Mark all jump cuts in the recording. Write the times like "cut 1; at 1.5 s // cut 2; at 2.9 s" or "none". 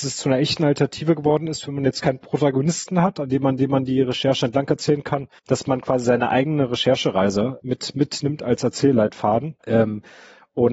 cut 1; at 3.6 s // cut 2; at 5.4 s // cut 3; at 7.6 s // cut 4; at 9.6 s